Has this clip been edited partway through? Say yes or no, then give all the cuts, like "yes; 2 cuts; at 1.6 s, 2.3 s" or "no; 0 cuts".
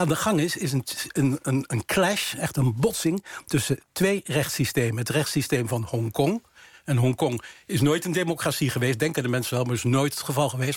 no; 0 cuts